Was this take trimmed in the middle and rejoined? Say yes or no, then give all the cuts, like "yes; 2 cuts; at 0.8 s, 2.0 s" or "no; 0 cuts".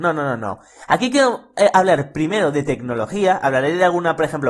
no; 0 cuts